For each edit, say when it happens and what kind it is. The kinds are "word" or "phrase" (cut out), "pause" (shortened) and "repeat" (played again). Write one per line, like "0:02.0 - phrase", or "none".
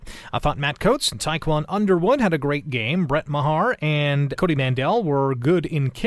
0:04.4 - word